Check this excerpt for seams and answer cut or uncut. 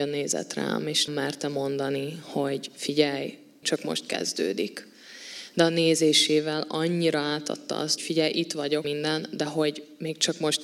cut